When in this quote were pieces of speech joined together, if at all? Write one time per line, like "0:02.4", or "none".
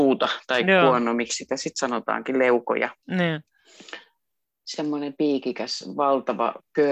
0:03.0